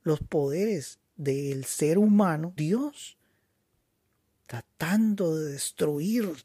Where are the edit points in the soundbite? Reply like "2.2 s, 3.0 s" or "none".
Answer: 2.6 s